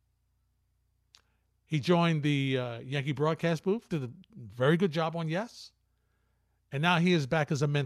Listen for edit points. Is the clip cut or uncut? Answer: uncut